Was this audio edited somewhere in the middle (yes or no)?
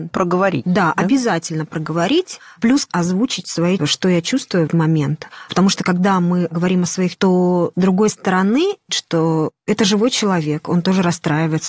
yes